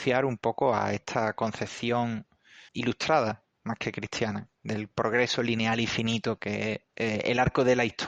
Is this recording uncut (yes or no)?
no